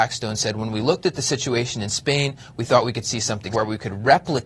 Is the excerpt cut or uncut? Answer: cut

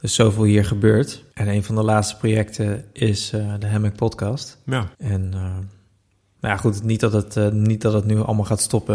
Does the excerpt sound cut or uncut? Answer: cut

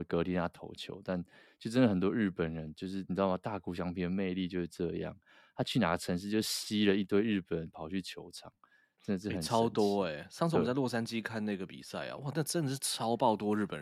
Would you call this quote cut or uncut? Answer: uncut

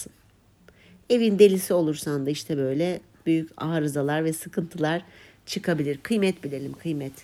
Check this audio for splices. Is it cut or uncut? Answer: uncut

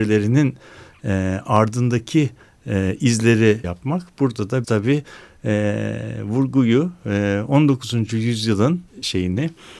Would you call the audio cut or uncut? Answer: cut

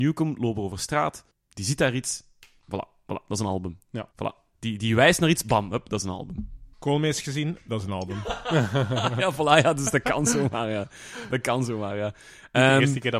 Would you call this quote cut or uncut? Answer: cut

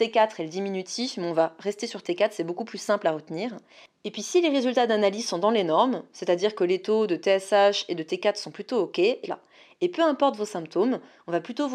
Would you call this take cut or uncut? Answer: cut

